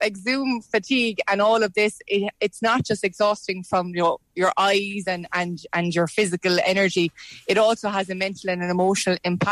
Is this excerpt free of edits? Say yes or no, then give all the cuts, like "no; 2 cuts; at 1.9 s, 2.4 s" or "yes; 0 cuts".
no; 1 cut; at 4.2 s